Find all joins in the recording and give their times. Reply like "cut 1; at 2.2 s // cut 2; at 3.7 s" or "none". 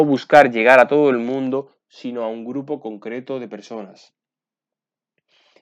none